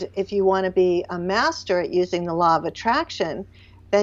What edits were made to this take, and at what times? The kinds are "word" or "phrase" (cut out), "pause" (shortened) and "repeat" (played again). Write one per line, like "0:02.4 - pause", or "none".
none